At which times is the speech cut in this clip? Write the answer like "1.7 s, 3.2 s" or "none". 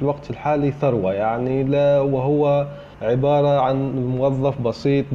2.9 s